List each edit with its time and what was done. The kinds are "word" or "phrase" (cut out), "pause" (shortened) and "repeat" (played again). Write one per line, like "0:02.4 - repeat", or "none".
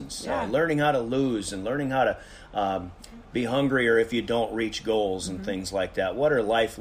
none